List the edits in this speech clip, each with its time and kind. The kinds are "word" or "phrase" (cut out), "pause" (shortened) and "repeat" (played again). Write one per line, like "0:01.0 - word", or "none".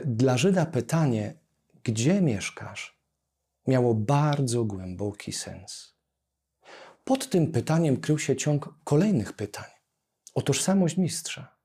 none